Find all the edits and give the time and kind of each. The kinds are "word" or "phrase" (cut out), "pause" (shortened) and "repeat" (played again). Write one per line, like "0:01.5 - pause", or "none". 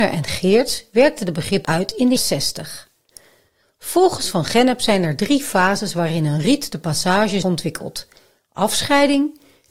0:01.6 - word
0:02.2 - word
0:07.4 - word